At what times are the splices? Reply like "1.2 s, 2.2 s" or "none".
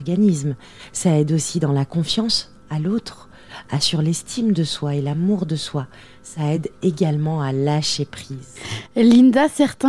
none